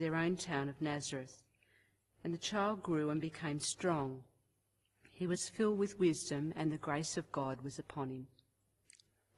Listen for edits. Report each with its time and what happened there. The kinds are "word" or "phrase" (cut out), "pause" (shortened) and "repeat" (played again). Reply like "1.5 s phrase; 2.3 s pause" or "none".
none